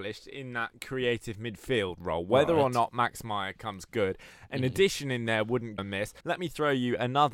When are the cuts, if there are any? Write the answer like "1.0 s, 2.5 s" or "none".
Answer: 5.8 s, 6.2 s